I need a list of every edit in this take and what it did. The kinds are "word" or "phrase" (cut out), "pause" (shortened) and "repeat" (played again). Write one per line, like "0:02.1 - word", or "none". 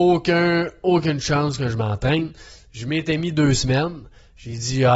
none